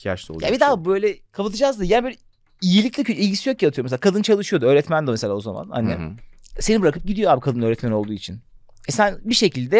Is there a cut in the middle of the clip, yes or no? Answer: no